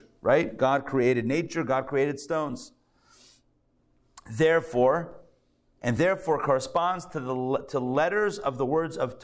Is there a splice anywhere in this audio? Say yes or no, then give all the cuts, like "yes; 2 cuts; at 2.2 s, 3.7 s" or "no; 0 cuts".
no; 0 cuts